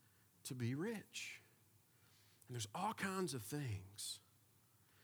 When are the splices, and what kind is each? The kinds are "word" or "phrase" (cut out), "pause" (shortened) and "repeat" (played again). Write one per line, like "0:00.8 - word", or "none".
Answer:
none